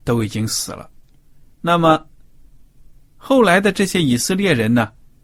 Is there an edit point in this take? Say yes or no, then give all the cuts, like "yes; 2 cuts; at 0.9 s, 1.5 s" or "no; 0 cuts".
no; 0 cuts